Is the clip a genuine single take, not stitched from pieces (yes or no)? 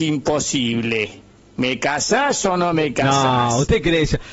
yes